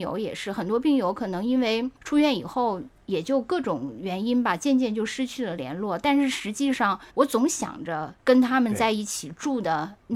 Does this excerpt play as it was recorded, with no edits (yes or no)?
no